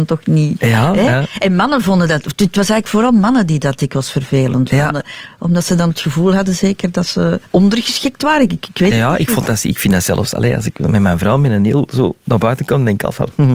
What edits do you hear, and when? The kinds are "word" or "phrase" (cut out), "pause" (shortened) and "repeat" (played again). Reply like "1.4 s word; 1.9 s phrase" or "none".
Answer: 7.5 s pause